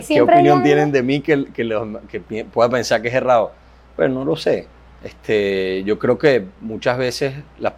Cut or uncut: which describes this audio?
uncut